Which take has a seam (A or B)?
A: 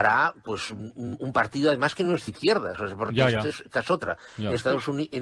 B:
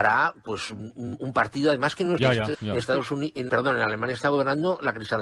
B